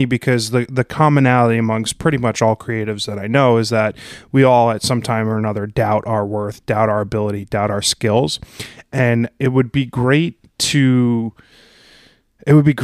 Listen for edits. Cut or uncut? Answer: uncut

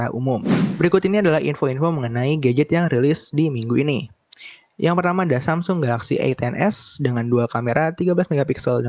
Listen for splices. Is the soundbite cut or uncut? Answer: uncut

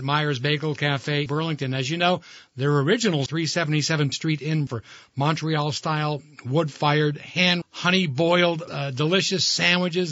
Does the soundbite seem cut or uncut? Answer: cut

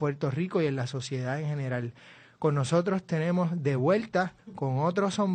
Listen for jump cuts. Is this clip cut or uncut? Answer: uncut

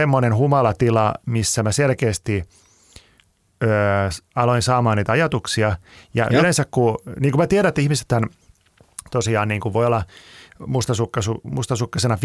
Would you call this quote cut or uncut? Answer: uncut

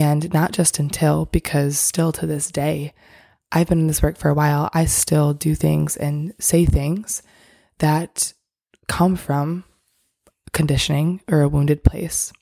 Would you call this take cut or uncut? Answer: uncut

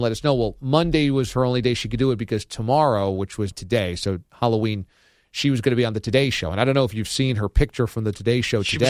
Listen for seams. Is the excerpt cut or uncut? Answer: cut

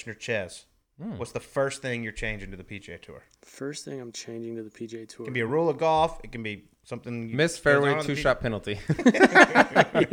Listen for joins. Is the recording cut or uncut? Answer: uncut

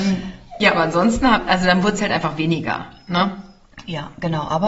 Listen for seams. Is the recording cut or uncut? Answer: uncut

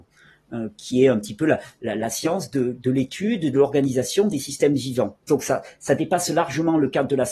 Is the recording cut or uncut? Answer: cut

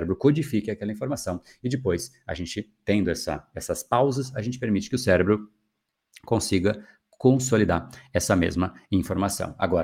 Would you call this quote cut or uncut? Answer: uncut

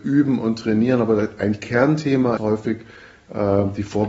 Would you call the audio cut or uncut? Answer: cut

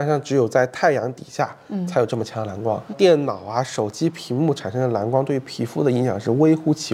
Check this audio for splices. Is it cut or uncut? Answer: uncut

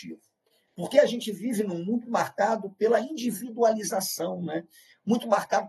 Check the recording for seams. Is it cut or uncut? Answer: cut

